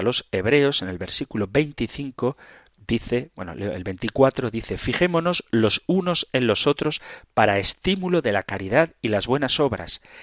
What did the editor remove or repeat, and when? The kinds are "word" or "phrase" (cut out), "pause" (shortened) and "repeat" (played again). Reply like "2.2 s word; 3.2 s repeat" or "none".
none